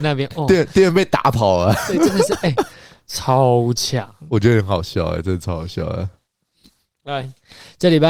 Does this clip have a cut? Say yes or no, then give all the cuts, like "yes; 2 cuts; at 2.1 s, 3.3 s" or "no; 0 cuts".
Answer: no; 0 cuts